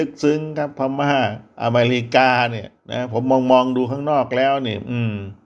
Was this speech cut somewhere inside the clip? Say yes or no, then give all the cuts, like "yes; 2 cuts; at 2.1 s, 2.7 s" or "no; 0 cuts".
yes; 1 cut; at 2.8 s